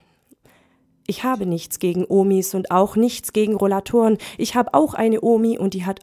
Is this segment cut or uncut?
uncut